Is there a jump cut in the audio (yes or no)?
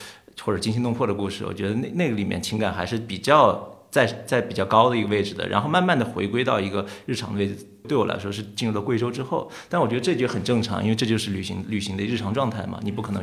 no